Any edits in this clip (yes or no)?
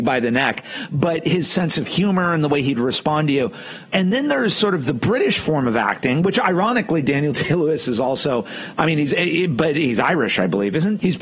no